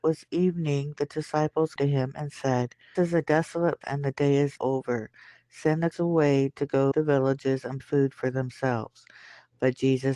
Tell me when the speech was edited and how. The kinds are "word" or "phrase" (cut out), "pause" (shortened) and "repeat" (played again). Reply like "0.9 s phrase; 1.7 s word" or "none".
1.8 s word; 3.0 s word; 3.8 s word; 4.6 s word; 5.9 s word; 6.9 s word; 7.8 s word